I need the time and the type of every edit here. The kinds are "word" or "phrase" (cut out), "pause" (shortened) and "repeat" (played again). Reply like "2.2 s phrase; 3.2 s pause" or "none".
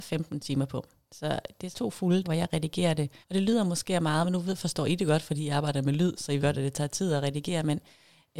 1.0 s pause; 1.7 s word; 2.2 s word; 3.2 s pause; 6.4 s word

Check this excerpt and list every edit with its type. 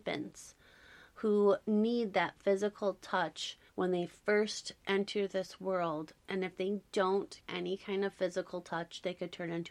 3.7 s pause; 7.4 s word

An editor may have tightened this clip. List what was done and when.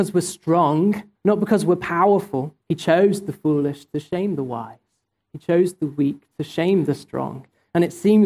1.1 s pause; 2.6 s pause

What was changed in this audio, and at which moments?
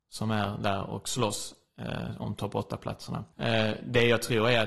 3.3 s pause

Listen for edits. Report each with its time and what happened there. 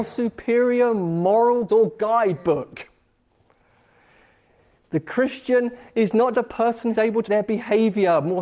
1.7 s word; 6.3 s word; 6.9 s word; 7.3 s word

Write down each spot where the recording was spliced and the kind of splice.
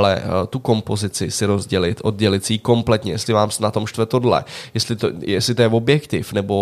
none

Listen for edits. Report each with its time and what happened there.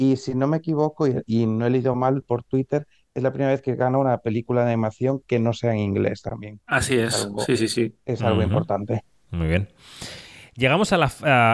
none

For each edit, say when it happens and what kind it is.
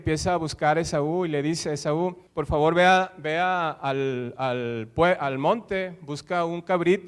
2.3 s pause

